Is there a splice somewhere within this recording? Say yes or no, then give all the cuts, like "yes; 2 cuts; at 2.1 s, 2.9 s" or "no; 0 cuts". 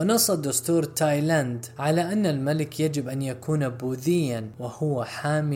no; 0 cuts